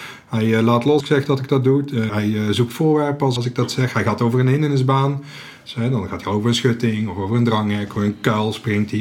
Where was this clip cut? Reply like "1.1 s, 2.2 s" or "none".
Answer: 1.0 s, 2.1 s, 3.4 s, 8.0 s